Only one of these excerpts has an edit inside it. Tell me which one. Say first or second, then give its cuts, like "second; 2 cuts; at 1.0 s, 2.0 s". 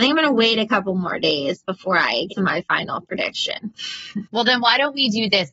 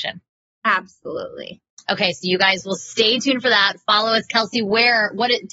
first; 2 cuts; at 2.3 s, 4.3 s